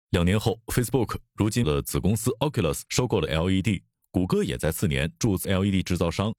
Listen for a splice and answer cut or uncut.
cut